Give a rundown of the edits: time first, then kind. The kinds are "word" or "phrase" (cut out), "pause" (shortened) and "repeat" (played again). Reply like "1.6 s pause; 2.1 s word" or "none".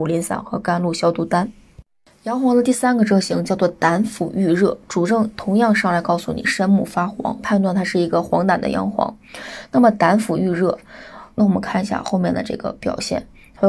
7.4 s phrase; 11.3 s word